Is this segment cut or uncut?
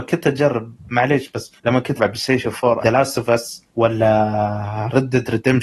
cut